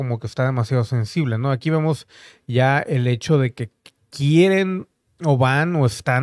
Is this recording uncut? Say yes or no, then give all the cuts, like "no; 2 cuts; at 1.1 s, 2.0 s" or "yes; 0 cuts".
yes; 0 cuts